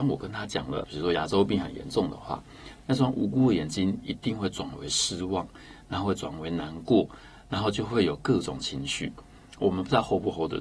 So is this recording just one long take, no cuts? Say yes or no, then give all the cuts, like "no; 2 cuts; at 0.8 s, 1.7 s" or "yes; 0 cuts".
yes; 0 cuts